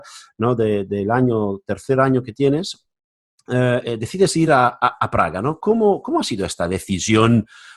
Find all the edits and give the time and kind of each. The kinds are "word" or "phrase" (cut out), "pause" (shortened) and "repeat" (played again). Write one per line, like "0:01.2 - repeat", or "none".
none